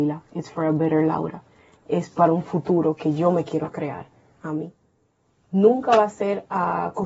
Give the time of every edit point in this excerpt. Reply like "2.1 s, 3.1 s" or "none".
none